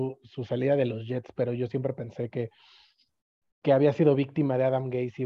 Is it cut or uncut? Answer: uncut